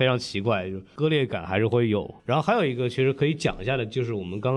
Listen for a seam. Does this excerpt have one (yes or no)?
yes